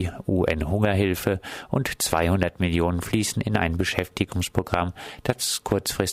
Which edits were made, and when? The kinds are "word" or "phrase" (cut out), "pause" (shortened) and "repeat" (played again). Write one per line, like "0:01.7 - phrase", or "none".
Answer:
none